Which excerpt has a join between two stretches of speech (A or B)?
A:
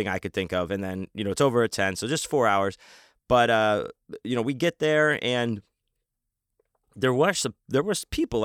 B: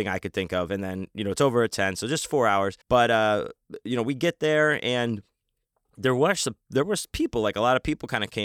B